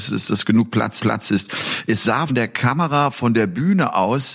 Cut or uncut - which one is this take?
cut